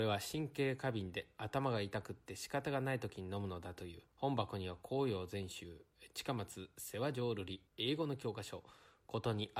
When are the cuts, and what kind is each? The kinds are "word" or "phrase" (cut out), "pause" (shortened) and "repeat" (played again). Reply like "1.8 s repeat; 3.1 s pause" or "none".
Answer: 4.1 s pause; 7.7 s pause